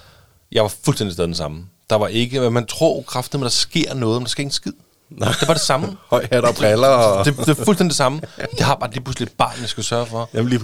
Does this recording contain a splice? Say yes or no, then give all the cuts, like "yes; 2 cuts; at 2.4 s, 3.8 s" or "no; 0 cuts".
no; 0 cuts